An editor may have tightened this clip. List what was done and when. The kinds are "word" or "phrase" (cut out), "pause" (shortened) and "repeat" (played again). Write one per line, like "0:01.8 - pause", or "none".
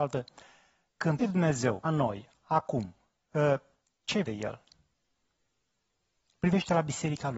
0:01.2 - word
0:01.8 - word
0:04.2 - word